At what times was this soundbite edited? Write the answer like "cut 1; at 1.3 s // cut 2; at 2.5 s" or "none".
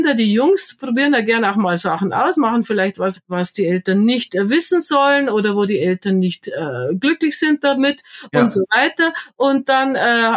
cut 1; at 3.2 s